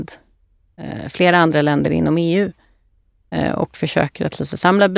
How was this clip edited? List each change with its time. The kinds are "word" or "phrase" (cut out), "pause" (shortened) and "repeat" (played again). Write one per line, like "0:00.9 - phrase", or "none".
none